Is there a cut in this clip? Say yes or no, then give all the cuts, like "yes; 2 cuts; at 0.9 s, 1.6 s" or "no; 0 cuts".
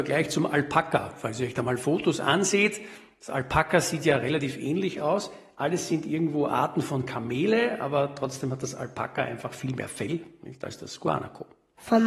no; 0 cuts